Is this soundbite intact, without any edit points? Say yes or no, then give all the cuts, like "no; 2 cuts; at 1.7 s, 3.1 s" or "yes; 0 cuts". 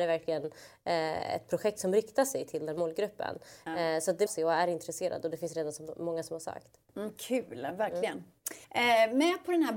no; 2 cuts; at 4.3 s, 8.6 s